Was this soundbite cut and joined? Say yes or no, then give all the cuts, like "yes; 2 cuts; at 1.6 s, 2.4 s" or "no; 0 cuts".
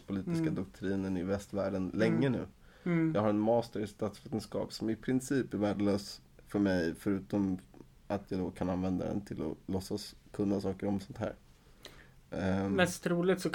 no; 0 cuts